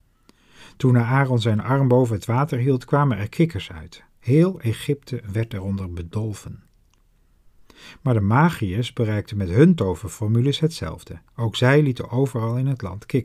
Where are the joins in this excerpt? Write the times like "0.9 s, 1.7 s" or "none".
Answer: none